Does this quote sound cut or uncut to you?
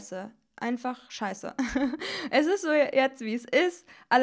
uncut